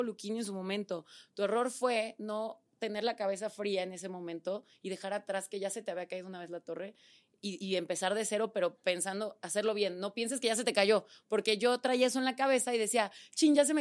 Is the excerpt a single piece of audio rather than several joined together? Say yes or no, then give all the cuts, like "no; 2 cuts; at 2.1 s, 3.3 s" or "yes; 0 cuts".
yes; 0 cuts